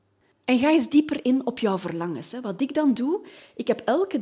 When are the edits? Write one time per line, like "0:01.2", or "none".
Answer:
none